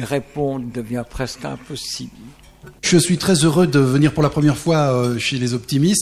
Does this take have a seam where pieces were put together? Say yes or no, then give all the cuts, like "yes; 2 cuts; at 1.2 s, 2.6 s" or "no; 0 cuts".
yes; 1 cut; at 2.8 s